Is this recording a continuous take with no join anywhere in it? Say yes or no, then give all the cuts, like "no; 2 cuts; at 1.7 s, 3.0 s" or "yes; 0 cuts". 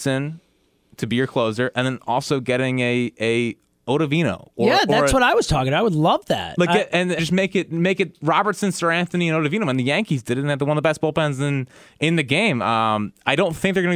no; 1 cut; at 7.2 s